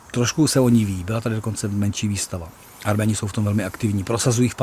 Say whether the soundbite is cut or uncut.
uncut